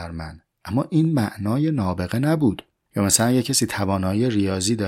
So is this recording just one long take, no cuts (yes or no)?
yes